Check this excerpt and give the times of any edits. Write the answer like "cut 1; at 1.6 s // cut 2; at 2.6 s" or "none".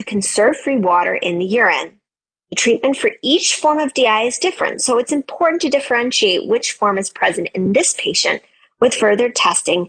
none